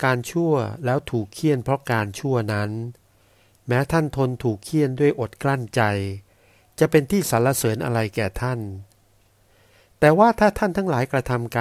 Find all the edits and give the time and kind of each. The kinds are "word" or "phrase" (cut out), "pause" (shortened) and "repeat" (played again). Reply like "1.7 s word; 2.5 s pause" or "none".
none